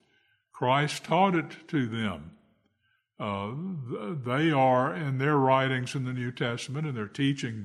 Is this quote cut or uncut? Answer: uncut